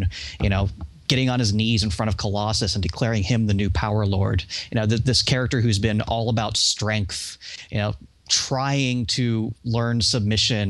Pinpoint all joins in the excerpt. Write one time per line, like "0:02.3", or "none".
none